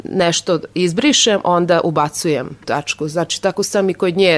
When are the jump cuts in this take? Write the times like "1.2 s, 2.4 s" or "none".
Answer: 2.6 s